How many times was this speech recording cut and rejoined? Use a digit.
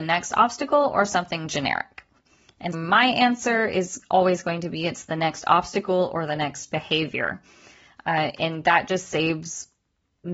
1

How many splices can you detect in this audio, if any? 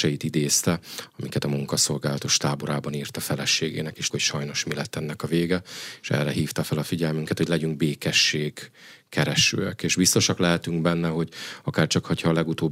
1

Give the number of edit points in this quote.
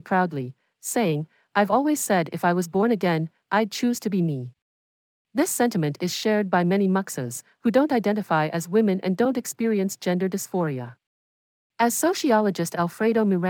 0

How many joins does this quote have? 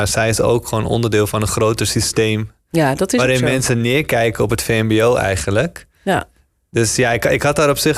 0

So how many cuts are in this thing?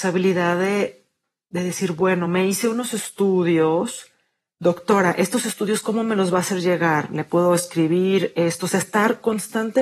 0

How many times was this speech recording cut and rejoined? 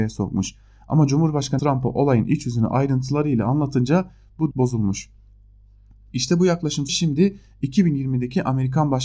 3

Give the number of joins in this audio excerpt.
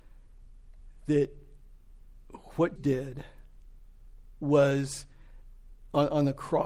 1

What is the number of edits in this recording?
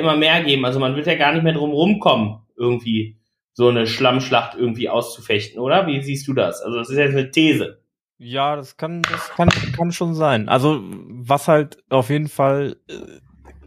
0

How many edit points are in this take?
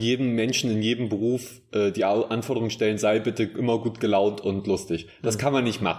0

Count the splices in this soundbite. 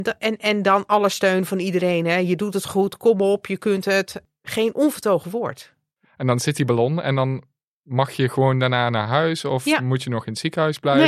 0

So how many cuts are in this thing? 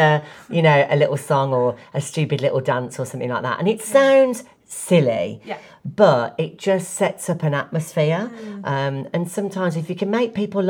0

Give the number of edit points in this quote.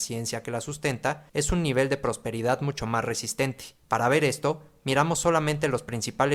2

